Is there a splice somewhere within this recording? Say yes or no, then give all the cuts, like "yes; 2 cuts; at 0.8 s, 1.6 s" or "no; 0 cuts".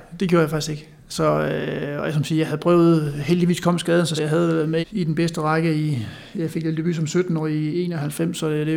yes; 2 cuts; at 4.2 s, 4.8 s